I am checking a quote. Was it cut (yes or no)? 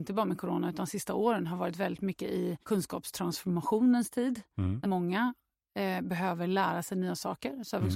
yes